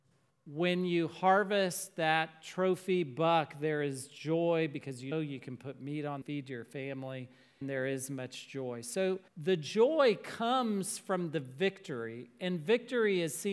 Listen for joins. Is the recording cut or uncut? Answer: cut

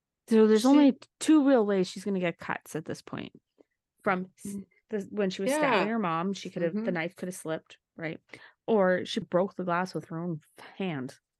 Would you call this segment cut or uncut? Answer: cut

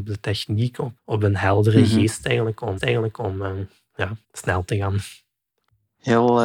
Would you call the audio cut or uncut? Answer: cut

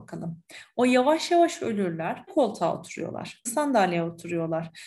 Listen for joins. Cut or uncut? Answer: cut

